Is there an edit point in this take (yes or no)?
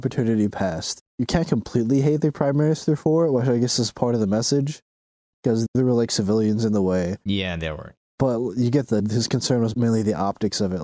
yes